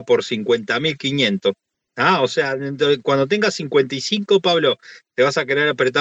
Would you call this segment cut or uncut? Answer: uncut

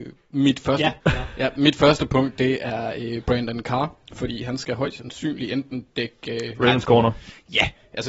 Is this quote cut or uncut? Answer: cut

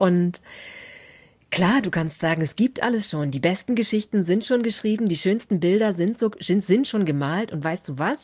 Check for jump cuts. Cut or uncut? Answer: uncut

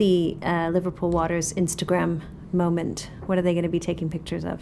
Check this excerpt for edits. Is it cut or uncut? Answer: uncut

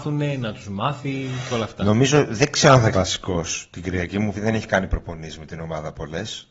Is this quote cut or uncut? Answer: cut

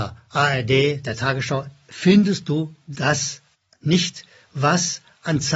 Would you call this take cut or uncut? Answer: cut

